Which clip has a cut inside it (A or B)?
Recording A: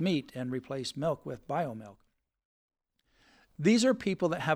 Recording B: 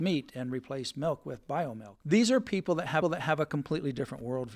B